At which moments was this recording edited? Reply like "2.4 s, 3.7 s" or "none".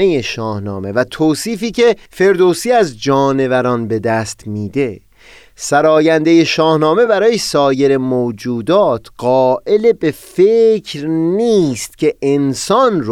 none